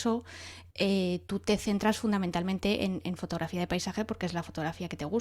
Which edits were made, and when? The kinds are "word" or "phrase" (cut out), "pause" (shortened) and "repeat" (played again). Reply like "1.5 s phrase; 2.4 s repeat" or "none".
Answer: none